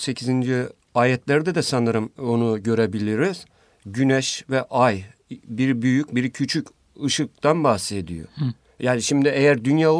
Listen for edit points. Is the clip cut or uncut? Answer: uncut